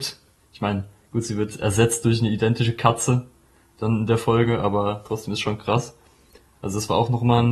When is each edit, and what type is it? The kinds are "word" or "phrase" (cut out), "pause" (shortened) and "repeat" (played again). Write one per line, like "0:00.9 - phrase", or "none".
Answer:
none